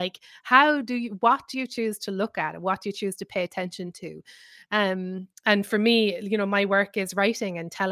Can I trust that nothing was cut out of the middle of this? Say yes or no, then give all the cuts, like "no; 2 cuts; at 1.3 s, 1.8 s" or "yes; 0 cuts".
yes; 0 cuts